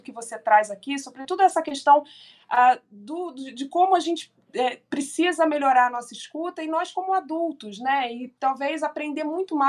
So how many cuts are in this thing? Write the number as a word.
zero